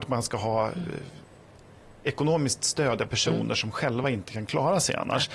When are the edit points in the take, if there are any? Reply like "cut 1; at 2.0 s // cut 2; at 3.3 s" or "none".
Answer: none